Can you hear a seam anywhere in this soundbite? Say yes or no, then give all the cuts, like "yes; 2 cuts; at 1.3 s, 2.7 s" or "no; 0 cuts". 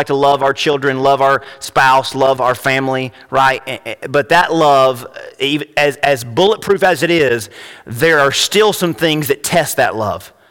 no; 0 cuts